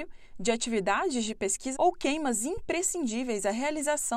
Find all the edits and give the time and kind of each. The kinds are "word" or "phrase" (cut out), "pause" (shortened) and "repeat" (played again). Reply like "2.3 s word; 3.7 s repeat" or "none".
1.7 s word